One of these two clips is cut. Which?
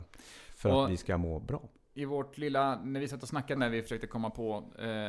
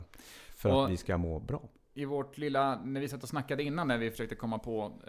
first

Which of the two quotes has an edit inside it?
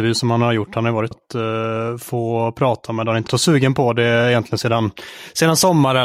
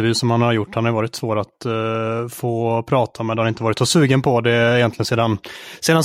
first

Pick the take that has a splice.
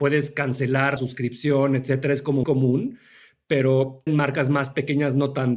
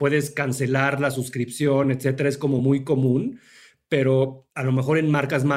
first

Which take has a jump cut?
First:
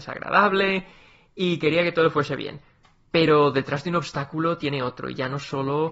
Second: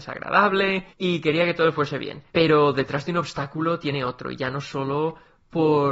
second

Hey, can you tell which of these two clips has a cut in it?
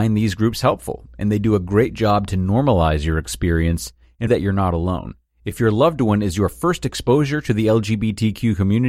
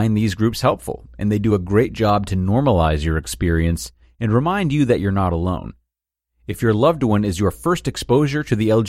first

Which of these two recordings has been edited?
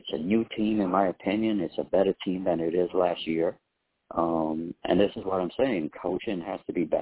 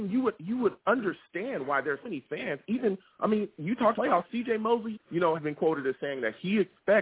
second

